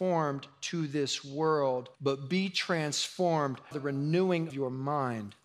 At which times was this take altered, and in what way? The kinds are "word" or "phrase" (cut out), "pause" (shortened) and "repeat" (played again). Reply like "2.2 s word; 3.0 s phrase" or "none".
1.9 s pause; 3.7 s word; 4.5 s word

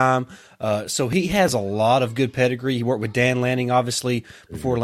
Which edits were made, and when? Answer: none

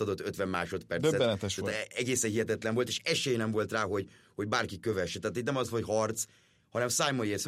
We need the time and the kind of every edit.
none

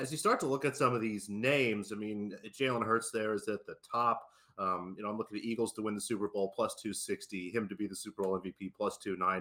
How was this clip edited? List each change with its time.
none

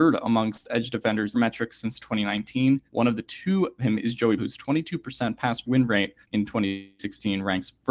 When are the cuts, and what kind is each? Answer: 1.3 s phrase; 2.9 s pause; 3.8 s phrase; 4.4 s word; 5.6 s word; 6.2 s pause

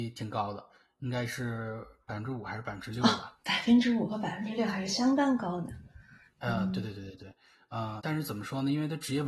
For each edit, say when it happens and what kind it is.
8.0 s word

